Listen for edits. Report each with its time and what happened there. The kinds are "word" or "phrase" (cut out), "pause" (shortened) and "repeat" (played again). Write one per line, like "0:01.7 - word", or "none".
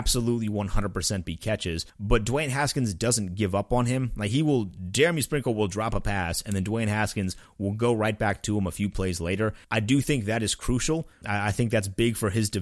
0:01.9 - pause
0:09.6 - pause
0:11.2 - word